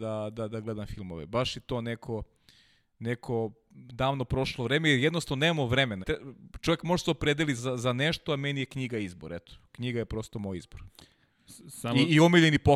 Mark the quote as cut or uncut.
cut